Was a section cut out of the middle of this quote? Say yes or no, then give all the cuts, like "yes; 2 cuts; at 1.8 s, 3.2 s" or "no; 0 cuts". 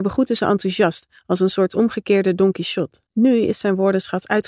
yes; 1 cut; at 3.1 s